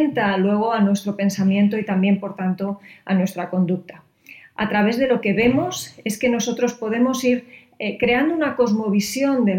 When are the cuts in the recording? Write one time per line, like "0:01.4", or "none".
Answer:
none